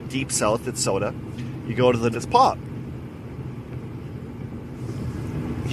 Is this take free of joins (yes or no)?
no